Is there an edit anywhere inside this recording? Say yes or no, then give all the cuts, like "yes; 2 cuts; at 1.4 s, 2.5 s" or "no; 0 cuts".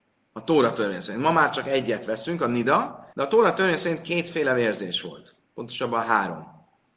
yes; 2 cuts; at 3.1 s, 5.4 s